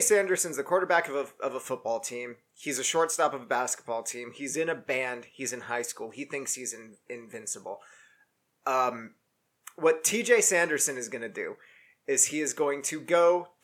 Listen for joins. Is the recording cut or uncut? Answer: uncut